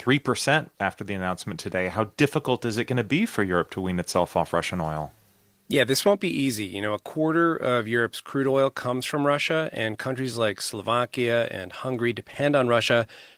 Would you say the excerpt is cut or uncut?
uncut